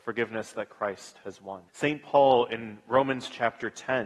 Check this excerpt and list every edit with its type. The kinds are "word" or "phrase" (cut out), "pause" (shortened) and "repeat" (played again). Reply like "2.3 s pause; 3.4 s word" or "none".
1.7 s pause